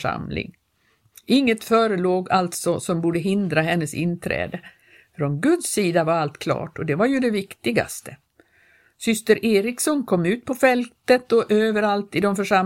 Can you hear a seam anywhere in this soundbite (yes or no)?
no